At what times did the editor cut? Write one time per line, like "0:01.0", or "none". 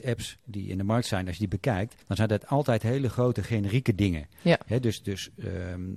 0:02.0

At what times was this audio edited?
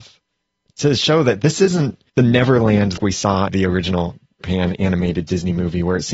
0:02.1
0:03.0
0:03.5
0:04.4

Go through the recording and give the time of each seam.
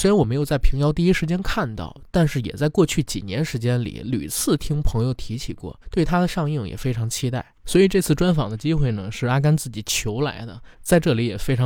0:05.8
0:10.7

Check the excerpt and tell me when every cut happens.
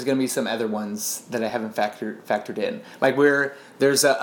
none

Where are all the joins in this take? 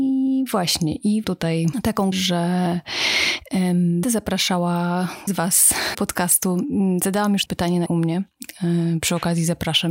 0:01.2
0:02.1
0:04.0
0:05.3
0:05.9
0:07.5
0:07.9

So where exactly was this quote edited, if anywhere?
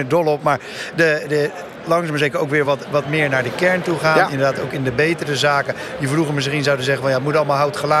none

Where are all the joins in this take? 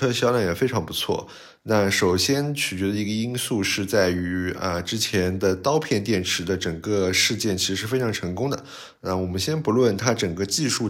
none

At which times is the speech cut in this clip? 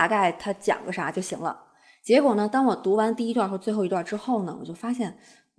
none

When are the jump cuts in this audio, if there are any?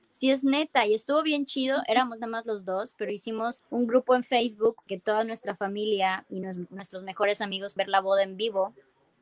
0:03.6
0:04.9
0:07.8

